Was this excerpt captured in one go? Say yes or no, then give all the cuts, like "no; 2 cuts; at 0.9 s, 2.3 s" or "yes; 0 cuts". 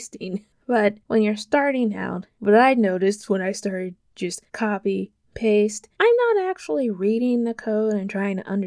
no; 3 cuts; at 2.3 s, 4.5 s, 5.9 s